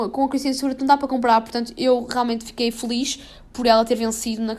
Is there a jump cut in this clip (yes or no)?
no